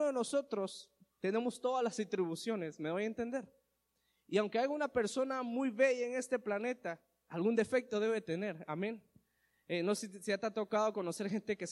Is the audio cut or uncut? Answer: uncut